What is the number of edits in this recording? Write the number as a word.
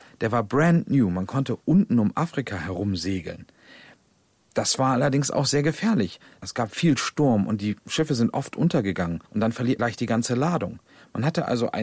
two